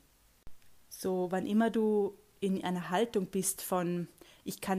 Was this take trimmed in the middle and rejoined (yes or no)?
no